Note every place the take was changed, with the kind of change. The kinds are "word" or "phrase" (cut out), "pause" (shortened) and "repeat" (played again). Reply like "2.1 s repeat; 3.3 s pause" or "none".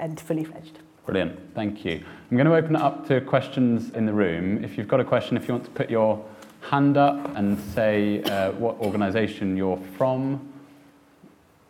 3.9 s word; 7.3 s word